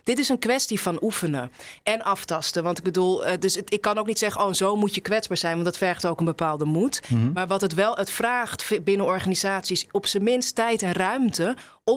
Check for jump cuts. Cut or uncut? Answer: uncut